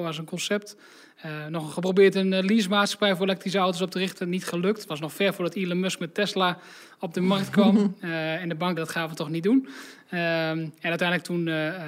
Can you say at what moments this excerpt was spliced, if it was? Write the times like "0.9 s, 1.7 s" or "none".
8.8 s